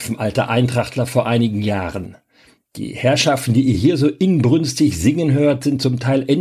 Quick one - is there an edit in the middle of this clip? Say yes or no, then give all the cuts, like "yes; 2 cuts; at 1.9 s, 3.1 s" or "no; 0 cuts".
no; 0 cuts